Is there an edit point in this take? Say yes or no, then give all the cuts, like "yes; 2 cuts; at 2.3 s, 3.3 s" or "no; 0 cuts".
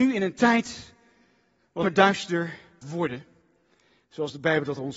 yes; 2 cuts; at 1.8 s, 2.8 s